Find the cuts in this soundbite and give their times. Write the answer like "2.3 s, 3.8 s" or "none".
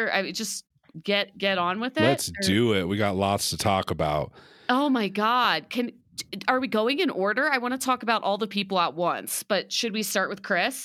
none